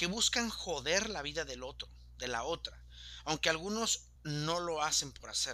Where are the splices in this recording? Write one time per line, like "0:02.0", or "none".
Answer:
0:04.2